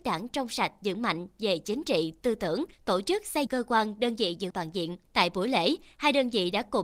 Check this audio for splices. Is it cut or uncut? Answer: cut